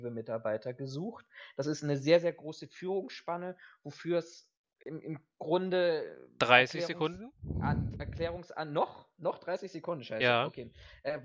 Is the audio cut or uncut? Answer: uncut